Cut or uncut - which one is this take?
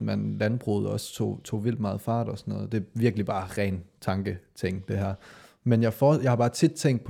uncut